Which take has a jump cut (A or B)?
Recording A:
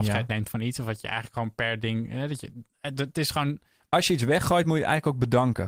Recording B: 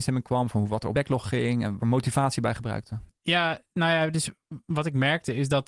B